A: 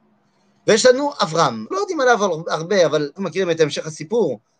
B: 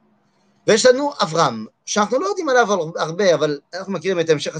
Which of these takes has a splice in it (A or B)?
A